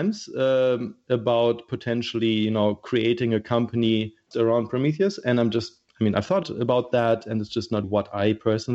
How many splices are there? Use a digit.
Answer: 4